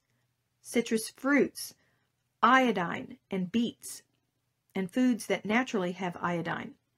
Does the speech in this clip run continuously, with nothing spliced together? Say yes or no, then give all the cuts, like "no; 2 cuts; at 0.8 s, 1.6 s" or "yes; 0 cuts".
yes; 0 cuts